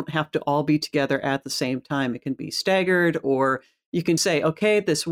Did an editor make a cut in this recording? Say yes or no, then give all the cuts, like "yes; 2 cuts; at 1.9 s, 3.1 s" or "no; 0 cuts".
yes; 1 cut; at 4.2 s